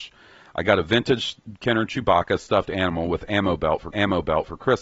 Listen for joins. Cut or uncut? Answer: cut